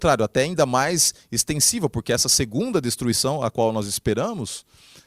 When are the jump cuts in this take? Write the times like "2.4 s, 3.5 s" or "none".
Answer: none